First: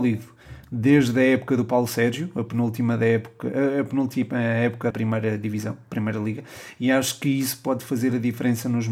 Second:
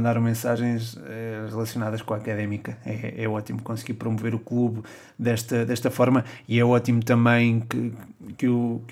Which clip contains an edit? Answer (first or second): first